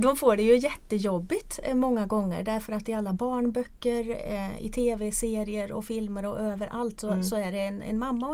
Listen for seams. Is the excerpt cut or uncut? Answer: uncut